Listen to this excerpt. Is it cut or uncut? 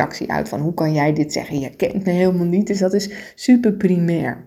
uncut